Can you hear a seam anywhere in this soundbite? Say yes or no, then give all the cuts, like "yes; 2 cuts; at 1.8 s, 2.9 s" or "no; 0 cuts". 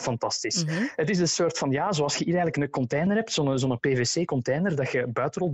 no; 0 cuts